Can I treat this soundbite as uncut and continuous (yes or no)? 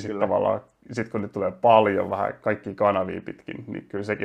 yes